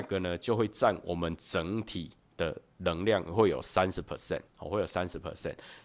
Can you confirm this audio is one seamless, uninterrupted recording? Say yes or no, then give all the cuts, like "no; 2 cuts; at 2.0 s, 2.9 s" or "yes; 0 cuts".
no; 1 cut; at 4.5 s